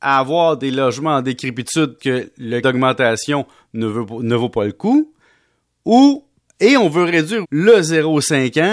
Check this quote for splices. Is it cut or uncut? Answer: cut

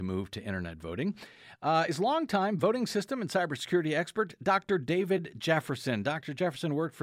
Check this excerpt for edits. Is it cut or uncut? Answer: uncut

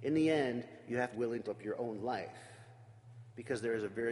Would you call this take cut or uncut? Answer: cut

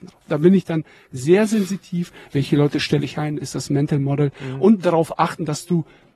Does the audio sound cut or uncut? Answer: uncut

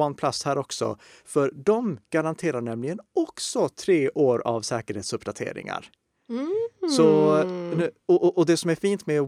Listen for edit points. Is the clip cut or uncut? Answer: uncut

